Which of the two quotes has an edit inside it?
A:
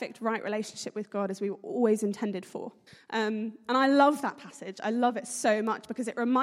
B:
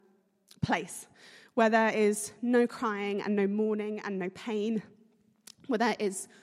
A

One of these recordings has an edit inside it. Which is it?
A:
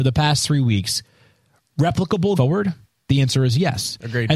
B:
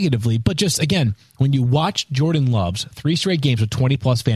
A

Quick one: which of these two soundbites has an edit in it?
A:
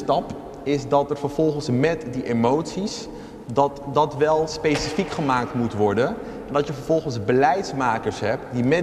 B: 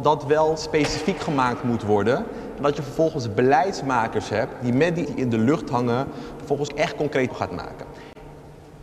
B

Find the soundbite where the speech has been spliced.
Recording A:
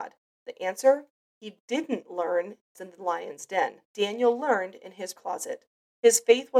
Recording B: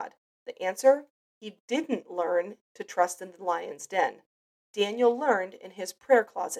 A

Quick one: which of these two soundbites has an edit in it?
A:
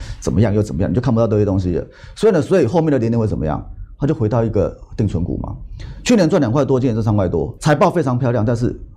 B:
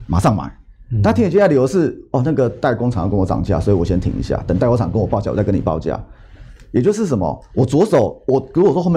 A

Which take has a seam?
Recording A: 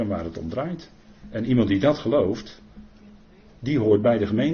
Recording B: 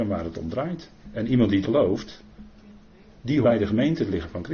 B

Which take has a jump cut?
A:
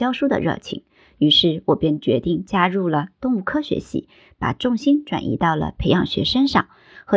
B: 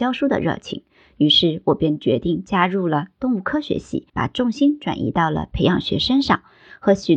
B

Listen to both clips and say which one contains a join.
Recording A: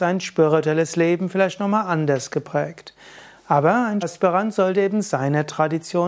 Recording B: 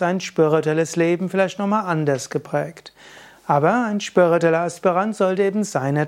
A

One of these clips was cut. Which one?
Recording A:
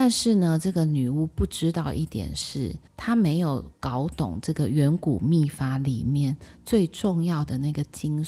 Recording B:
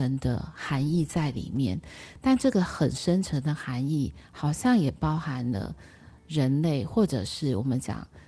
A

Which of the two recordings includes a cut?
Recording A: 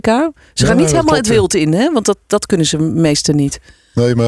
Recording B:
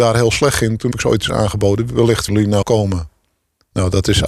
B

